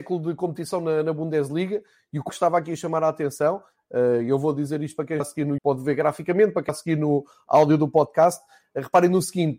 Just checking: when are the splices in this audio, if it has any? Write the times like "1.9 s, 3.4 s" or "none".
2.3 s, 5.2 s, 5.6 s, 6.7 s